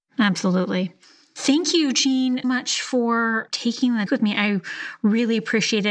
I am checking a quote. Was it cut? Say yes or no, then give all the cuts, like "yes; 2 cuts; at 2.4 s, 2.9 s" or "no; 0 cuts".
yes; 2 cuts; at 2.4 s, 4.1 s